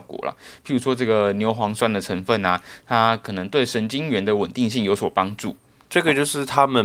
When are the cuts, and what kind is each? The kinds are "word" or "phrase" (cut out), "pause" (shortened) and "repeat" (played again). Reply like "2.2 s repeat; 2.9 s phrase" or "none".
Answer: none